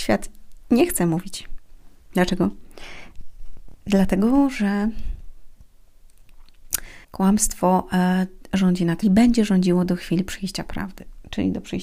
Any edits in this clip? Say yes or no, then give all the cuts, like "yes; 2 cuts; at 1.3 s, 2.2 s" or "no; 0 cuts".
yes; 2 cuts; at 7.0 s, 9.0 s